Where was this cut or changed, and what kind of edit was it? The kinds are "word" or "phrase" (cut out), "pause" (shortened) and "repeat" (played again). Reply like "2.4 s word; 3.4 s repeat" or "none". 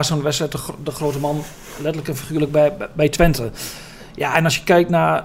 none